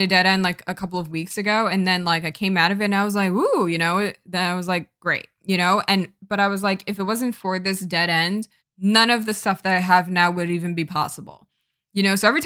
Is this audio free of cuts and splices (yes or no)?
no